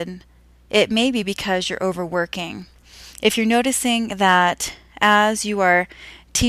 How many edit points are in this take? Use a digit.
0